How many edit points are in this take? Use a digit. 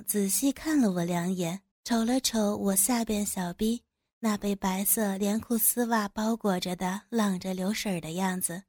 1